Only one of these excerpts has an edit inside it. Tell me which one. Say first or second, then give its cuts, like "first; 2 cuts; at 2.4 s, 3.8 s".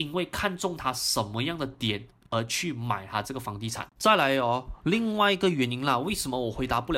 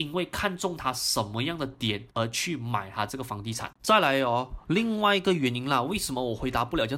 second; 1 cut; at 2.1 s